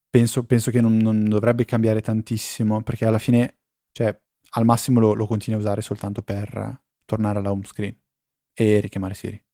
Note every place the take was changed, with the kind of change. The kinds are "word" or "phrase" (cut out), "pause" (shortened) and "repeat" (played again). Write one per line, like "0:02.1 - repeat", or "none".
0:04.2 - pause
0:06.9 - pause